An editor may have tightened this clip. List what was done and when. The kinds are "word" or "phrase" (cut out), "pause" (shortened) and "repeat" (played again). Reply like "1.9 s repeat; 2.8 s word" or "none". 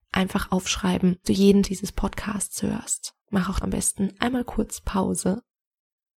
1.2 s word; 1.6 s phrase; 3.2 s pause; 3.6 s word